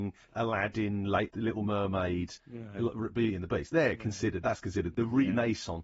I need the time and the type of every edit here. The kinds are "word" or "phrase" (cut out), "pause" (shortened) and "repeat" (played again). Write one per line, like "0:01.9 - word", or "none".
0:01.3 - word
0:02.4 - pause